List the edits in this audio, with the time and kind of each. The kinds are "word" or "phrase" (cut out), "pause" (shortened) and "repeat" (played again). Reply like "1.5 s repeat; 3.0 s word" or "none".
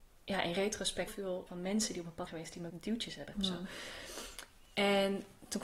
1.1 s word; 1.5 s word; 2.3 s word; 2.7 s word; 3.3 s word